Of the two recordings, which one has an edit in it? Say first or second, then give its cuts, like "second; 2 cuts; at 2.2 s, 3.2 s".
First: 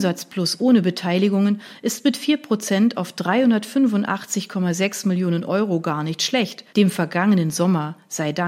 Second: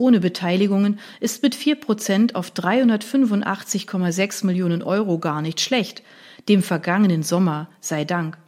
first; 1 cut; at 6.7 s